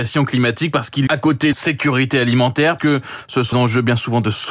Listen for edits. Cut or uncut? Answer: cut